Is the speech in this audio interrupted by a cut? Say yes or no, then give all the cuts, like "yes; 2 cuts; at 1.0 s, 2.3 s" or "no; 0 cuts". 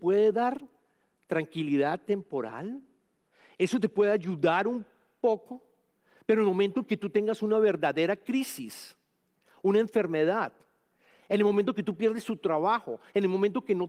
no; 0 cuts